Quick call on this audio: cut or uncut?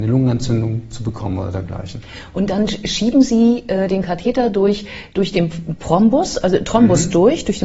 uncut